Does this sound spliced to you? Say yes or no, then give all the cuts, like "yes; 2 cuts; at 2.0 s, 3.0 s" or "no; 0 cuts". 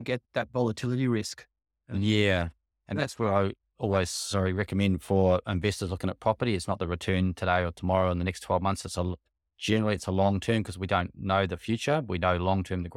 no; 0 cuts